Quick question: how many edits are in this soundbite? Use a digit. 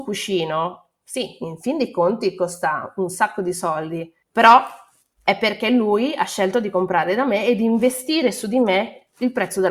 0